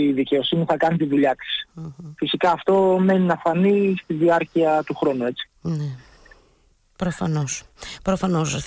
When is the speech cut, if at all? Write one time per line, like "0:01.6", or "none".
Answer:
none